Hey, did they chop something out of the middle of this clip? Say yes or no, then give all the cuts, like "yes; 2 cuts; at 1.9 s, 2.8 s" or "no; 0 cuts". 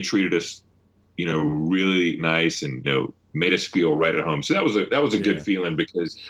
yes; 2 cuts; at 2.2 s, 2.8 s